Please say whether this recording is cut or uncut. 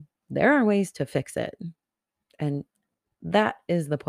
uncut